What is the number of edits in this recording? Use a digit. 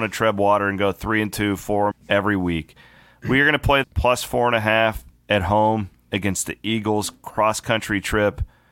2